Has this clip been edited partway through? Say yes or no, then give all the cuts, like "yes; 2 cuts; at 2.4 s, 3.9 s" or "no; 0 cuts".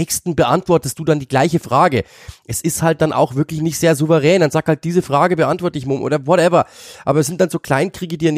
no; 0 cuts